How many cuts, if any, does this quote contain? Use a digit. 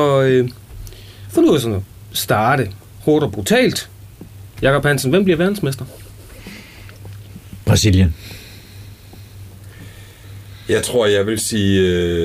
0